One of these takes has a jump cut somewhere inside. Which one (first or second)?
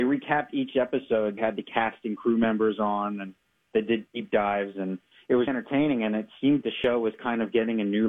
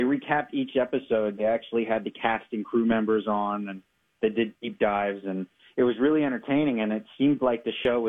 first